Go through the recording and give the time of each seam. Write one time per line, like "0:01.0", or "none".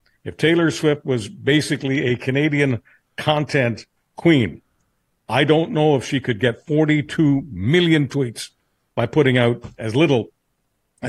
none

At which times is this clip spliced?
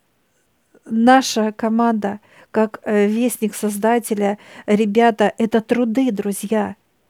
none

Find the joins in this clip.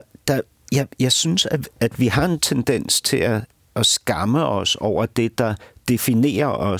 none

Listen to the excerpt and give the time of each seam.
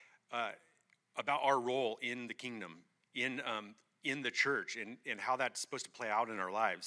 0:03.0

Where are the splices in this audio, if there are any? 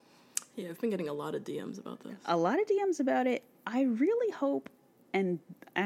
none

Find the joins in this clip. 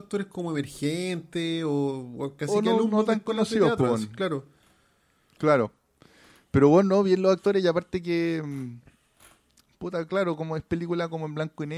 none

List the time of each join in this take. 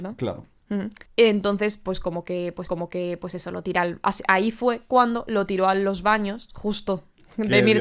0:01.1
0:02.7

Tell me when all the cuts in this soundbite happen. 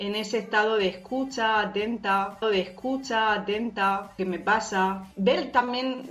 0:02.4

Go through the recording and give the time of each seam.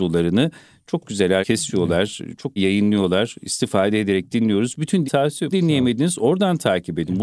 0:01.4
0:02.6
0:05.0
0:05.5

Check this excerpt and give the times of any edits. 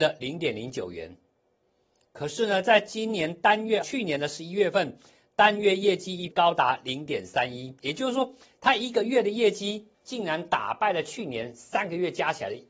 0:03.8
0:06.3
0:09.9

